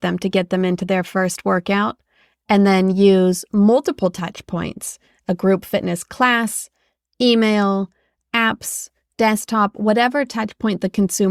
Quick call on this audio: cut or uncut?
uncut